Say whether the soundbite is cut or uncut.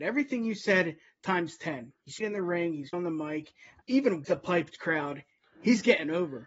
cut